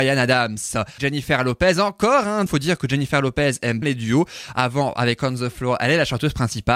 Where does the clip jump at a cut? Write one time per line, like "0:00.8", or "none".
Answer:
0:01.0
0:02.5
0:03.8